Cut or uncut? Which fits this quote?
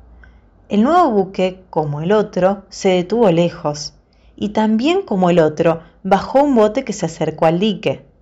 uncut